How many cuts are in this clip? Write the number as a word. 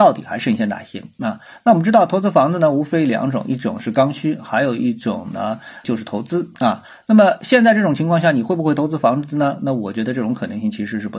one